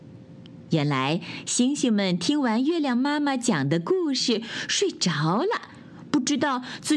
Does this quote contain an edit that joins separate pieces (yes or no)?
no